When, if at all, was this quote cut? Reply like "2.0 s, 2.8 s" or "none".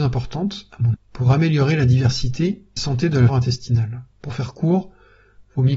0.9 s, 2.8 s, 3.3 s, 4.1 s